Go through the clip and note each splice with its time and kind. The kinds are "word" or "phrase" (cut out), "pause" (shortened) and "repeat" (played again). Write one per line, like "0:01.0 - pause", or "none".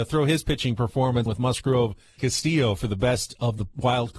0:01.3 - word
0:02.2 - word